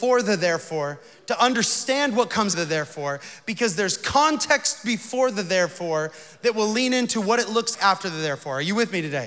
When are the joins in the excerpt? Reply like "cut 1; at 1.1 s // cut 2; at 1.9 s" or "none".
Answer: cut 1; at 2.5 s // cut 2; at 7.7 s